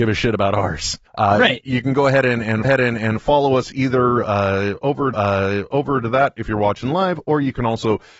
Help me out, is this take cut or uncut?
cut